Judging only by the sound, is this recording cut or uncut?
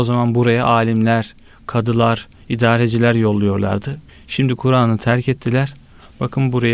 cut